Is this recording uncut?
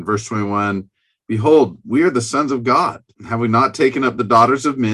no; 1 cut; at 3.1 s

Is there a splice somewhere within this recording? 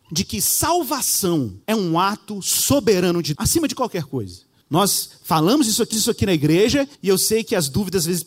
yes; 5 cuts; at 1.6 s, 3.3 s, 4.6 s, 5.9 s, 6.9 s

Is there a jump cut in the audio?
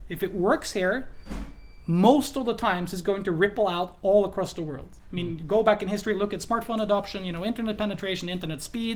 no; 0 cuts

